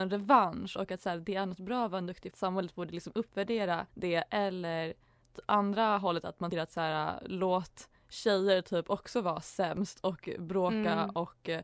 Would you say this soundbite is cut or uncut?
cut